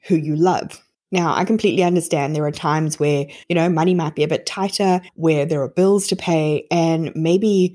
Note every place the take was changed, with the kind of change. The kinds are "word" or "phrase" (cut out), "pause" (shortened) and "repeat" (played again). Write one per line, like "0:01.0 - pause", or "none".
0:00.9 - pause
0:03.4 - pause
0:05.1 - pause